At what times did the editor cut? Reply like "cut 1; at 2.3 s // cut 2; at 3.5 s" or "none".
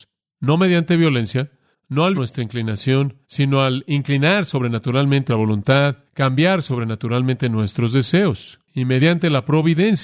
cut 1; at 1.7 s // cut 2; at 2.1 s // cut 3; at 3.2 s // cut 4; at 5.3 s // cut 5; at 6.1 s // cut 6; at 8.6 s